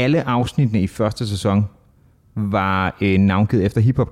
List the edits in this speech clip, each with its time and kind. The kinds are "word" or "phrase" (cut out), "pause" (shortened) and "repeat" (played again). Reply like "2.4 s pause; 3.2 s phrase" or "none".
none